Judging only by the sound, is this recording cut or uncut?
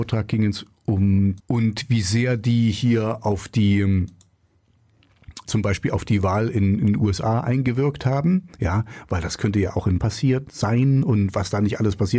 cut